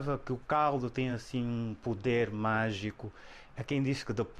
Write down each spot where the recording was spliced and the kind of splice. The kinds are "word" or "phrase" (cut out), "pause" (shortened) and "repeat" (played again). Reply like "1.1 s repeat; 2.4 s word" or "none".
none